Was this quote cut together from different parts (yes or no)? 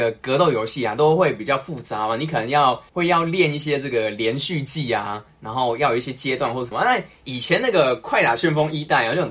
yes